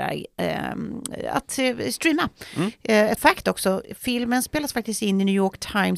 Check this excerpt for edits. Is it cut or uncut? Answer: cut